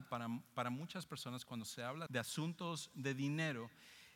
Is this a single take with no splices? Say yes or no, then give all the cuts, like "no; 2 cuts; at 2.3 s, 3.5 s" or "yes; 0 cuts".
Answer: no; 1 cut; at 2.1 s